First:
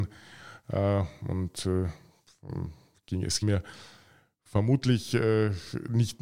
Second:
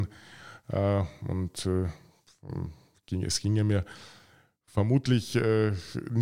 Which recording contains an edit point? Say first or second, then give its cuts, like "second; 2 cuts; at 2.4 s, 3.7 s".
first; 1 cut; at 3.4 s